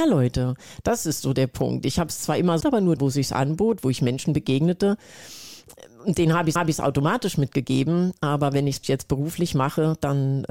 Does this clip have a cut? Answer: yes; 4 cuts; at 2.6 s, 3.0 s, 6.6 s, 8.8 s

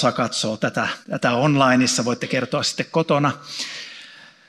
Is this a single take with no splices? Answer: no; 1 cut; at 1.0 s

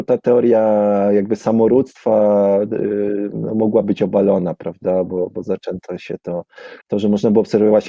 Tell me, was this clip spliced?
yes; 1 cut; at 6.8 s

